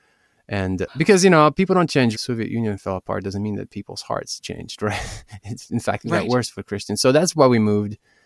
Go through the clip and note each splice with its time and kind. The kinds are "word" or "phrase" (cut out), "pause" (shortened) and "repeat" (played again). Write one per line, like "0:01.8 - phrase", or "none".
0:02.1 - phrase